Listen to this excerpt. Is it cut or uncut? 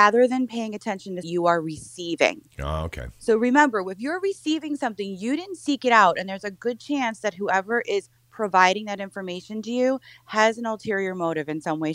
cut